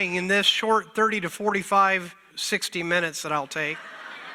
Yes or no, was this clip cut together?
yes